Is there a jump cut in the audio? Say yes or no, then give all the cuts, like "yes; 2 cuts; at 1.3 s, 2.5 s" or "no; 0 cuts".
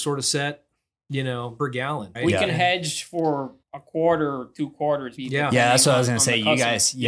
yes; 4 cuts; at 1.6 s, 2.1 s, 3.6 s, 5.2 s